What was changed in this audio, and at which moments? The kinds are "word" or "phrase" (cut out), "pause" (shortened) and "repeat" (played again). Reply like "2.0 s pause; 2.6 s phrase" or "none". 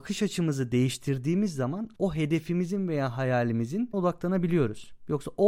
1.9 s word; 3.9 s word